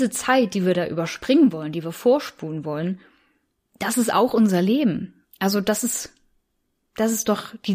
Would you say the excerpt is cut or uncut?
uncut